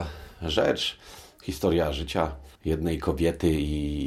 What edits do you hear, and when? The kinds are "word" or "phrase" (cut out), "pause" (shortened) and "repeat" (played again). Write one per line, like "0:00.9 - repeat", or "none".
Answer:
0:02.6 - pause